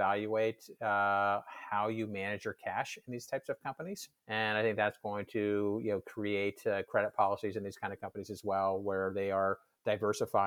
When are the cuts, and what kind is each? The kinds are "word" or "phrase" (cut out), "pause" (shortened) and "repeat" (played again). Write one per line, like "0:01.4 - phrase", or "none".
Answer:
0:04.2 - pause